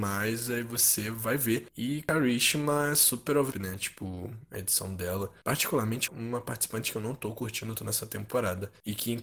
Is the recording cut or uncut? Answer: cut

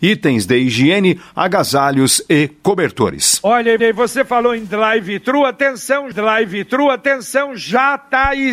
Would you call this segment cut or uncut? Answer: cut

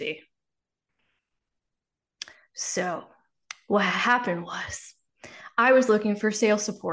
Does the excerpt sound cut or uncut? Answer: uncut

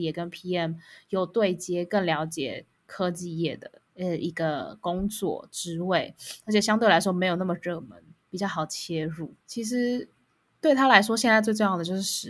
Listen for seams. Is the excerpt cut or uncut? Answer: cut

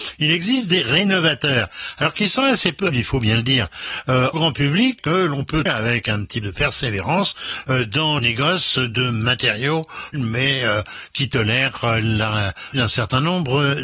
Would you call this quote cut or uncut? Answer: cut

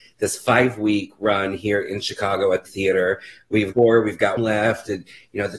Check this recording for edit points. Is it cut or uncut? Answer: cut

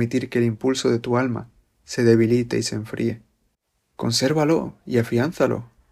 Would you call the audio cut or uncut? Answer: uncut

